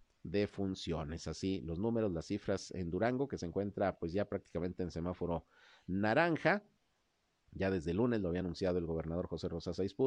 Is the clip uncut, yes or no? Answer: yes